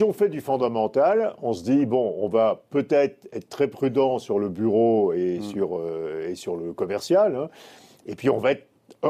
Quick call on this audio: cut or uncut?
uncut